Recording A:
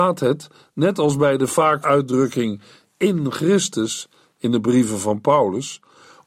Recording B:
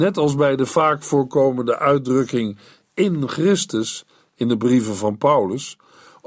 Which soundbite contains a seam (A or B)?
A